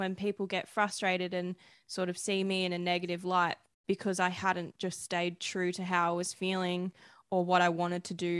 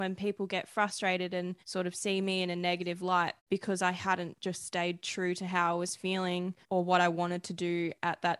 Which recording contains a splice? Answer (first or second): second